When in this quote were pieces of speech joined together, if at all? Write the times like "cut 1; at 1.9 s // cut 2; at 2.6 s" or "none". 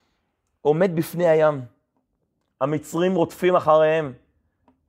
none